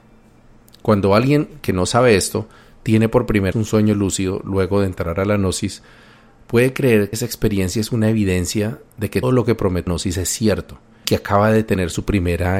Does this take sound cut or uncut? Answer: cut